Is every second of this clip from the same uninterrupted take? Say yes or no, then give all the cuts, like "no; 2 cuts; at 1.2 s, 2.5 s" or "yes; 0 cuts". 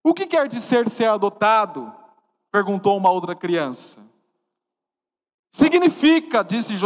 yes; 0 cuts